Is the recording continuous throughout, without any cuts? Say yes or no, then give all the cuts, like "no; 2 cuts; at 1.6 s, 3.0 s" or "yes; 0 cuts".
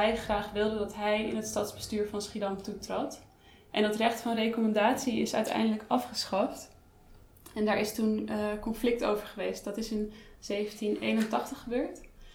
yes; 0 cuts